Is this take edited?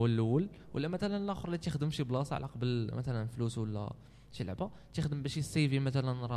no; 0 cuts

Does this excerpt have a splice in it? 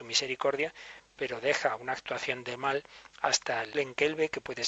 yes; 1 cut; at 3.7 s

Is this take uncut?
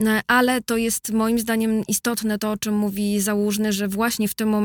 yes; 0 cuts

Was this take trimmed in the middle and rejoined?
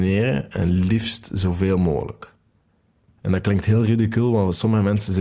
no; 0 cuts

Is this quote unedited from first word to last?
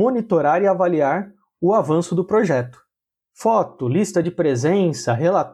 yes; 0 cuts

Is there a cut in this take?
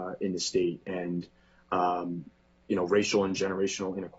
no; 0 cuts

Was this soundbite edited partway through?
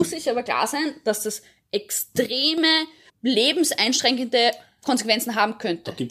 yes; 1 cut; at 3.1 s

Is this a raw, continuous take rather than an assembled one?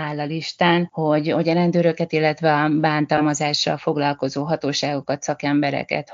yes; 0 cuts

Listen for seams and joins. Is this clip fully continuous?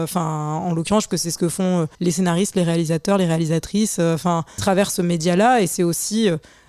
no; 3 cuts; at 1.1 s, 1.9 s, 4.6 s

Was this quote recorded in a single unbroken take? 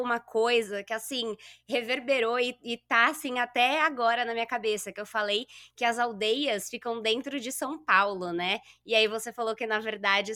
yes; 0 cuts

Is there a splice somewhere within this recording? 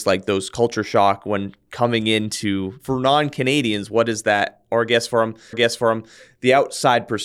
yes; 1 cut; at 5.5 s

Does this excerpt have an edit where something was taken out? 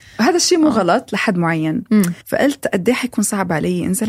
yes; 1 cut; at 2.2 s

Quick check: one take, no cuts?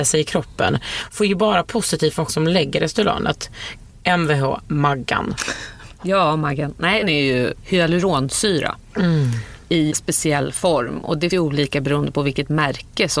no; 4 cuts; at 2.3 s, 7.0 s, 9.9 s, 11.3 s

